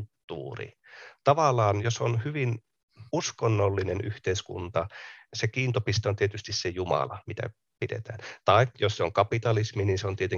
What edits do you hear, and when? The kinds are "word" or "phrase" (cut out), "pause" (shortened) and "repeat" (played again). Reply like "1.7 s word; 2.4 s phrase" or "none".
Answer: 1.8 s word; 3.1 s pause; 5.3 s word; 7.2 s pause